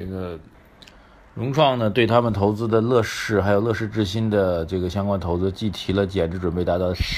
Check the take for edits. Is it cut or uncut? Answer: uncut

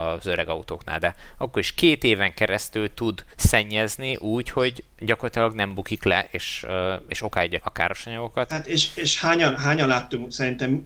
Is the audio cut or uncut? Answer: cut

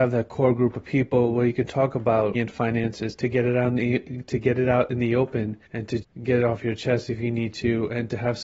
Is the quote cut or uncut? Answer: cut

